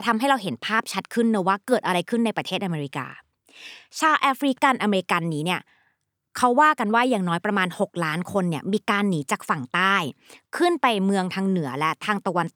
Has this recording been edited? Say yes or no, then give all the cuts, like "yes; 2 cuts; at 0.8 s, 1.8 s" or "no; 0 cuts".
no; 0 cuts